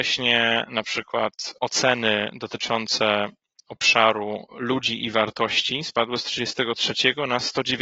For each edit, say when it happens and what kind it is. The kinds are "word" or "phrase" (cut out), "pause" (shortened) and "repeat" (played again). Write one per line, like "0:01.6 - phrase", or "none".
none